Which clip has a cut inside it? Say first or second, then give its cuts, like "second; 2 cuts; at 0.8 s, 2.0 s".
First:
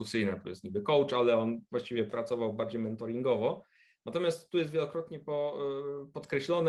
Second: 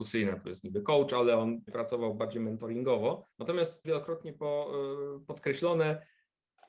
second; 3 cuts; at 1.7 s, 3.3 s, 3.8 s